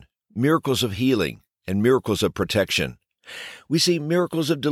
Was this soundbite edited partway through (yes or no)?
no